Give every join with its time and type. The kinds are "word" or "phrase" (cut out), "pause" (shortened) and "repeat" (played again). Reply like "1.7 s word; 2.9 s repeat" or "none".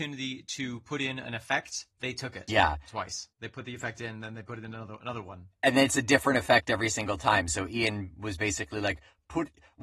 1.9 s pause; 3.3 s pause